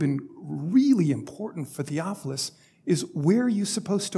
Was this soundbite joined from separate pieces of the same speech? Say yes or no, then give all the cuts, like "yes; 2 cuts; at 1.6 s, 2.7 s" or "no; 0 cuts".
no; 0 cuts